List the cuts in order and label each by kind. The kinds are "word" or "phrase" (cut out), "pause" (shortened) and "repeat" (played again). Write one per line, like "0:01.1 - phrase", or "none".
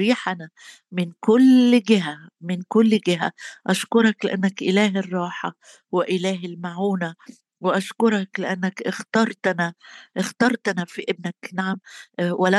0:11.5 - word